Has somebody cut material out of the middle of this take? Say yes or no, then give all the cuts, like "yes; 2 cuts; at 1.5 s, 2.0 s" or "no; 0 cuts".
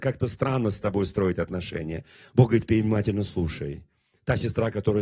no; 0 cuts